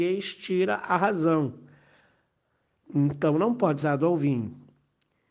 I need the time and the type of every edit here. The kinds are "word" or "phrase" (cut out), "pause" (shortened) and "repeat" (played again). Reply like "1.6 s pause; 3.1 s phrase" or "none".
3.8 s word